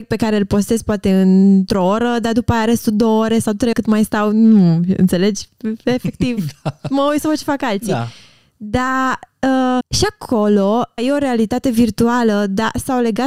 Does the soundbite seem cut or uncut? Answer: cut